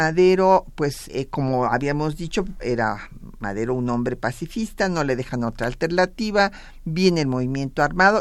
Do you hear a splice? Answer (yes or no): yes